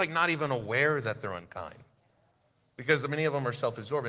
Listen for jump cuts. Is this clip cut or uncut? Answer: uncut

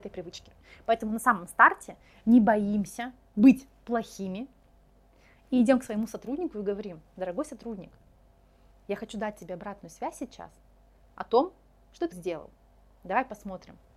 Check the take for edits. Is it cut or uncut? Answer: cut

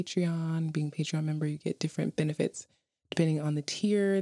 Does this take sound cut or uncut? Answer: uncut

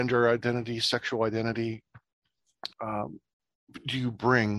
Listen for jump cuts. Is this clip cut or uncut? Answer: cut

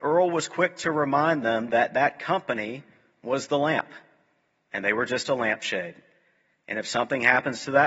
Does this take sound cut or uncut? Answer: uncut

